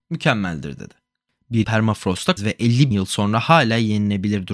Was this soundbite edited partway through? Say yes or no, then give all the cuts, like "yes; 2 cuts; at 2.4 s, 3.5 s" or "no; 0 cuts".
yes; 3 cuts; at 1.6 s, 2.4 s, 2.9 s